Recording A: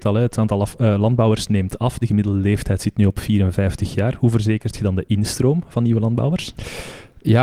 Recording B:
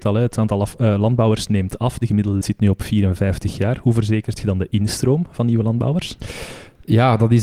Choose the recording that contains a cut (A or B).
B